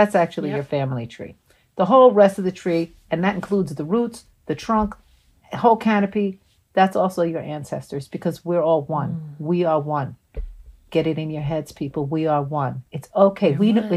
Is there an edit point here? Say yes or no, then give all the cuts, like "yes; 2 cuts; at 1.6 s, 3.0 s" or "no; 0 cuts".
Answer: no; 0 cuts